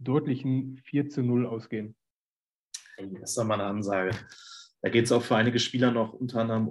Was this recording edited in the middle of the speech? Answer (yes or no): no